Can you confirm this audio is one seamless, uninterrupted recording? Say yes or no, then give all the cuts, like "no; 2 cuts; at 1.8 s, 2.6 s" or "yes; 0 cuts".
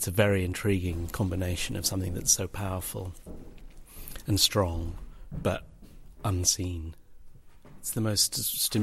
yes; 0 cuts